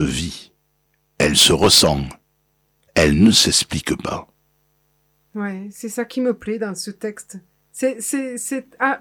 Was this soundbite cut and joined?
no; 0 cuts

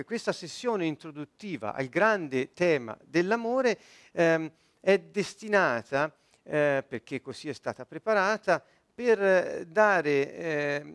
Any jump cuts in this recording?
no; 0 cuts

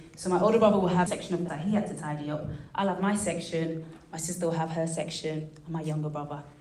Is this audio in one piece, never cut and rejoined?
no; 2 cuts; at 1.1 s, 1.5 s

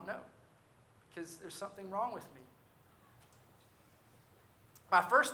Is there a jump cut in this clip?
no; 0 cuts

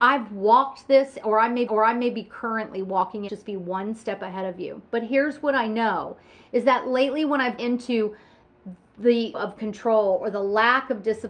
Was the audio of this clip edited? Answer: yes; 5 cuts; at 1.7 s, 3.3 s, 4.9 s, 7.6 s, 9.3 s

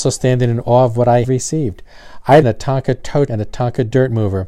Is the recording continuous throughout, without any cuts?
no; 3 cuts; at 1.2 s, 2.4 s, 3.3 s

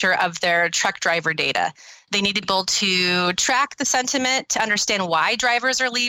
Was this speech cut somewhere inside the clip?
yes; 1 cut; at 2.4 s

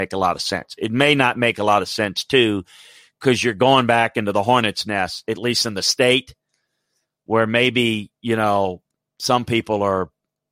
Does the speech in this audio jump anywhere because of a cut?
no; 0 cuts

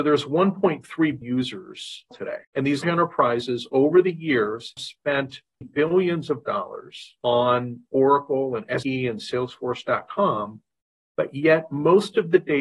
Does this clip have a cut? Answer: yes; 8 cuts; at 1.2 s, 2.1 s, 2.4 s, 2.8 s, 4.8 s, 5.6 s, 7.2 s, 8.8 s

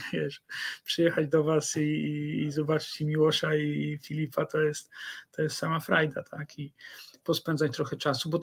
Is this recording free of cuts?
yes; 0 cuts

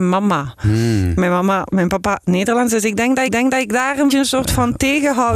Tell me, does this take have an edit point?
yes; 3 cuts; at 1.7 s, 3.3 s, 4.1 s

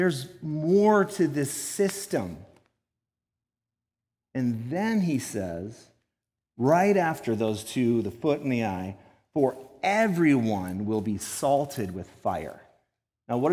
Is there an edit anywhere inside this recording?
no; 0 cuts

